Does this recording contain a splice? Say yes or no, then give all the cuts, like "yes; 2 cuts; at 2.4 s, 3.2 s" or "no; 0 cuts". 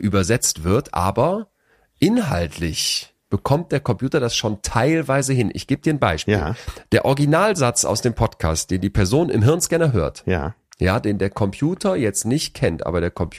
no; 0 cuts